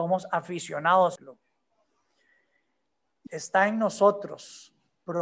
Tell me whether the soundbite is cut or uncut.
cut